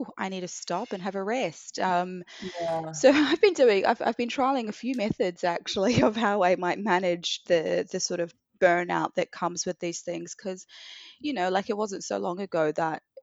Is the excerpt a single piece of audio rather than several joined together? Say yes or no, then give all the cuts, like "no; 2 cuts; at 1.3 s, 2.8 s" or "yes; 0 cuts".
yes; 0 cuts